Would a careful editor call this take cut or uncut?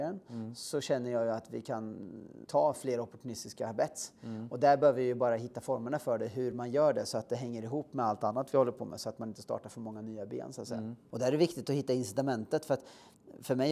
uncut